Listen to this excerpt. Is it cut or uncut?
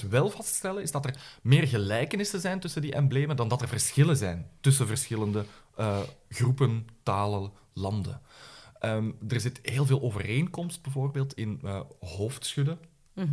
uncut